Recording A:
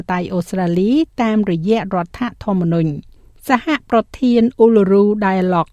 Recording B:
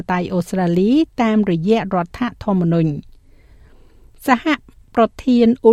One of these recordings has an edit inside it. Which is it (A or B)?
A